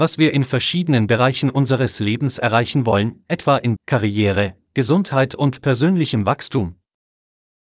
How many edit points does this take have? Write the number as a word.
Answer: one